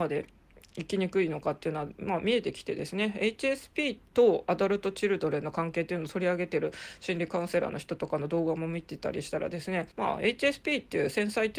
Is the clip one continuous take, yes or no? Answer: no